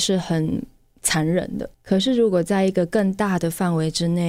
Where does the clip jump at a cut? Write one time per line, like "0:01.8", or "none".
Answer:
0:01.7